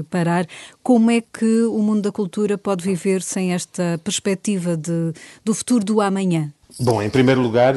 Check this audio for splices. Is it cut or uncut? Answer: uncut